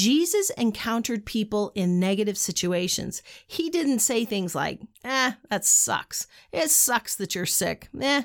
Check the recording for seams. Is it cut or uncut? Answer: cut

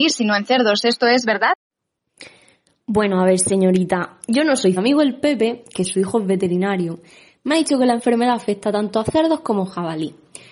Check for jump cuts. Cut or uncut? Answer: cut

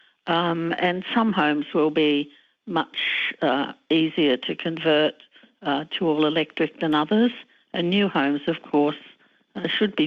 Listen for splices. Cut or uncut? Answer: uncut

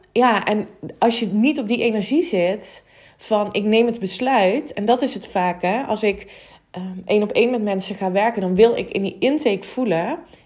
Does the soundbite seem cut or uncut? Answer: uncut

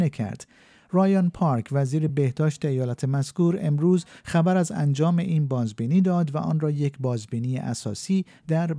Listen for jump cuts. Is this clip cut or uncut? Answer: uncut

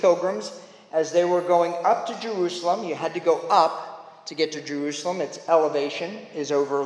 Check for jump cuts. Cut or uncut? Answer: uncut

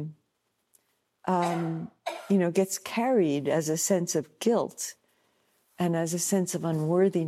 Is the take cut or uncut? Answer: uncut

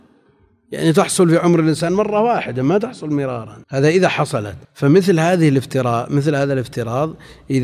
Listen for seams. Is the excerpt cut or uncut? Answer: cut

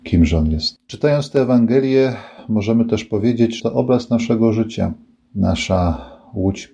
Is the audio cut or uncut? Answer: cut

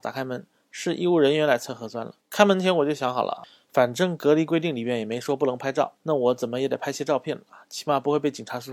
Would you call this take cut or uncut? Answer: cut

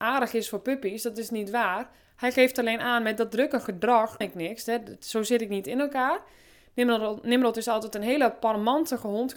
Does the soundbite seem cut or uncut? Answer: cut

